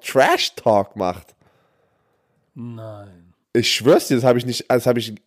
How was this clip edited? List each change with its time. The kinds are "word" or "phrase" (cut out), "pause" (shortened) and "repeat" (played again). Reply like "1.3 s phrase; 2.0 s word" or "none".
3.4 s pause